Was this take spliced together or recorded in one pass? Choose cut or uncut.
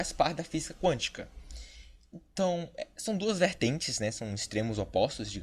uncut